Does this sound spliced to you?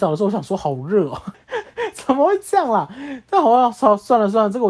yes; 1 cut; at 1.3 s

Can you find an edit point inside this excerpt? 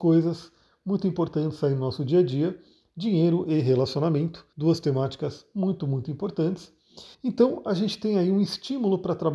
yes; 2 cuts; at 4.5 s, 7.1 s

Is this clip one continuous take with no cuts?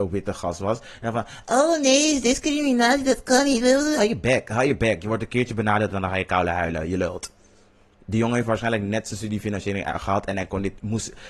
yes; 0 cuts

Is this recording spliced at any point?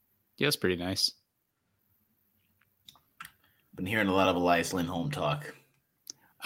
no; 0 cuts

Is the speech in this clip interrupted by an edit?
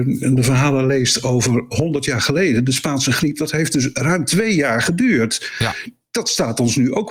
no; 0 cuts

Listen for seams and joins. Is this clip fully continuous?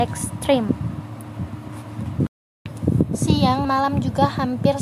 no; 1 cut; at 3.6 s

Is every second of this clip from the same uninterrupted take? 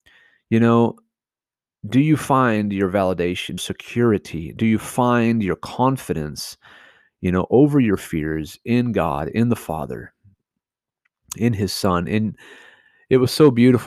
no; 1 cut; at 3.6 s

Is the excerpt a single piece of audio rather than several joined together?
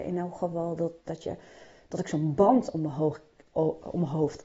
yes; 0 cuts

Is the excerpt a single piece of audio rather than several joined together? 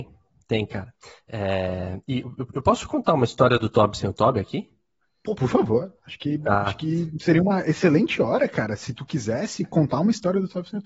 yes; 0 cuts

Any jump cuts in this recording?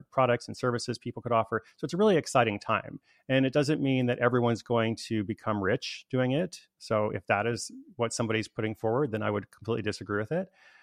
no; 0 cuts

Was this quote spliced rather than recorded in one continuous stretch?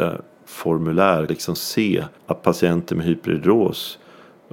yes; 2 cuts; at 1.3 s, 2.2 s

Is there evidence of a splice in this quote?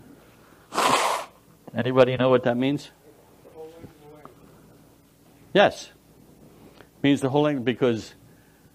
no; 0 cuts

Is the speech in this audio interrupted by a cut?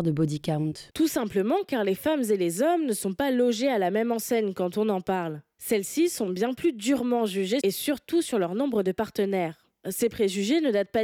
yes; 1 cut; at 7.6 s

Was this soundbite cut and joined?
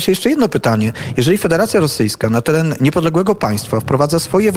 no; 0 cuts

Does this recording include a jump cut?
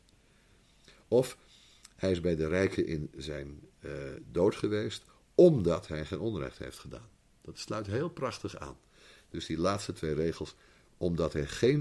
no; 0 cuts

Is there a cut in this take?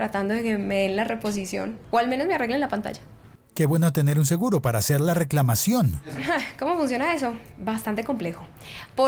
no; 0 cuts

